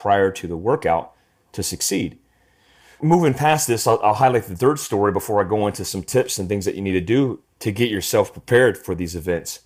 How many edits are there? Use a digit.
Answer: 0